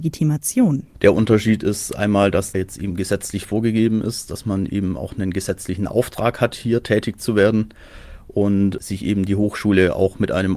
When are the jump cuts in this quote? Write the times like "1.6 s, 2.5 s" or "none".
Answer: 2.5 s